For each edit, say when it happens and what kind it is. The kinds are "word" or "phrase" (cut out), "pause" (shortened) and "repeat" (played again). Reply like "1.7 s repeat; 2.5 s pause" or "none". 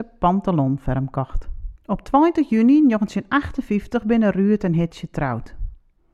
1.8 s pause